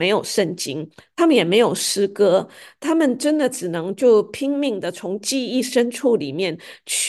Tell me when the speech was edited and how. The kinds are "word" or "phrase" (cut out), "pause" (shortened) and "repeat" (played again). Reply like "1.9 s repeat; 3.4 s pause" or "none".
none